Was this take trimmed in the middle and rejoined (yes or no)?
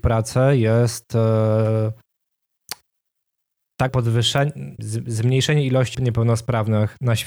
yes